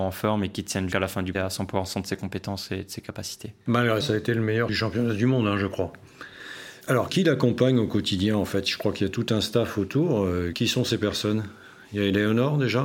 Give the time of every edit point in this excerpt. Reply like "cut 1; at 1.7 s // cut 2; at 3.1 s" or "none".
cut 1; at 0.9 s // cut 2; at 1.3 s // cut 3; at 4.0 s // cut 4; at 4.7 s